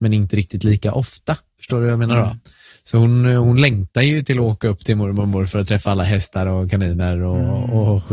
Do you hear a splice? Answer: no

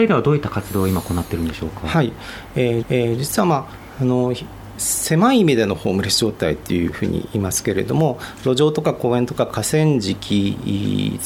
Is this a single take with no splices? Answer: no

